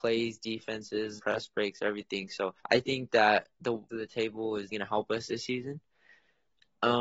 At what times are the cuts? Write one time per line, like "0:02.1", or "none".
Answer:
0:01.2
0:02.6
0:03.9
0:04.7